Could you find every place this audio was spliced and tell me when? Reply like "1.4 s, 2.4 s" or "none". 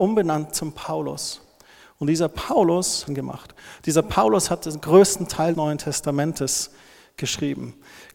3.1 s, 5.5 s